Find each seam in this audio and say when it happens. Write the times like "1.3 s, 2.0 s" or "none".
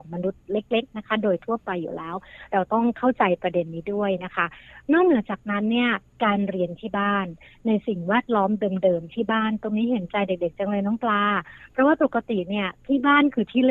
none